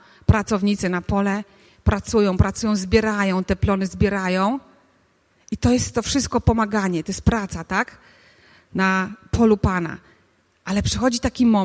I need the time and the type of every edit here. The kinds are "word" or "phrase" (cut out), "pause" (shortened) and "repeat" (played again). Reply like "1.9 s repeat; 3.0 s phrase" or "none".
none